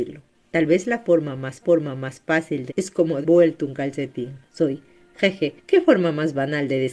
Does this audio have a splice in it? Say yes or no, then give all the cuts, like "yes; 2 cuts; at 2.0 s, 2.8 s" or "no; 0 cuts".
yes; 5 cuts; at 1.6 s, 2.7 s, 3.2 s, 4.5 s, 5.6 s